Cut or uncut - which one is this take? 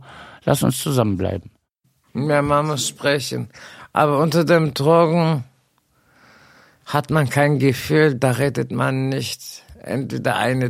uncut